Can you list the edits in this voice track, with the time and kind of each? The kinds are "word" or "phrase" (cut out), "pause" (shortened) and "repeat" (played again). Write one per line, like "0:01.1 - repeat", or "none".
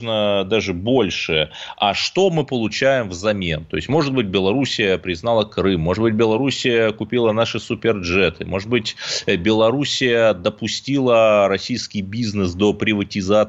none